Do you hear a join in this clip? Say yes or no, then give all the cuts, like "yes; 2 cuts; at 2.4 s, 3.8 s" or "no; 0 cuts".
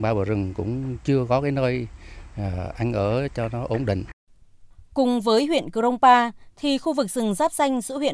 no; 0 cuts